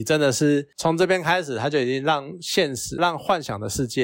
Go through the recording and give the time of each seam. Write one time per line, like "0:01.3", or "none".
0:03.0